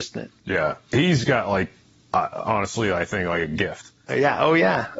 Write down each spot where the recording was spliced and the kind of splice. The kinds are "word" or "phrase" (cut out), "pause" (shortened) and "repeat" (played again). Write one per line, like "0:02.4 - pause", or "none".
none